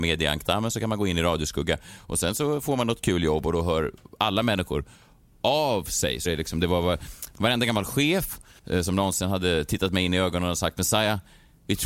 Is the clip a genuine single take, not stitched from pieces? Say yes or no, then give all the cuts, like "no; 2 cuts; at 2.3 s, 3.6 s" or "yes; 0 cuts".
no; 1 cut; at 6.3 s